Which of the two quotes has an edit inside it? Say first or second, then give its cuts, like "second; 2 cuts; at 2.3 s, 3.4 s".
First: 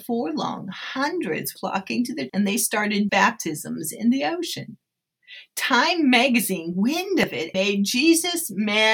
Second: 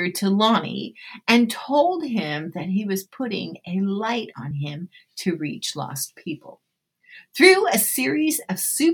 first; 5 cuts; at 1.6 s, 2.3 s, 3.1 s, 6.7 s, 7.5 s